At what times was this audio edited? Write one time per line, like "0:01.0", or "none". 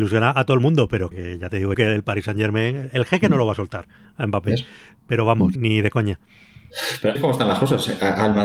0:01.1
0:01.7
0:05.6
0:07.2